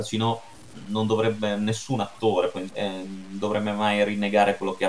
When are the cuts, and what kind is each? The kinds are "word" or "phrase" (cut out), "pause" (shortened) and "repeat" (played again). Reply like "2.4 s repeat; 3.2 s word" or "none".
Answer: 2.7 s word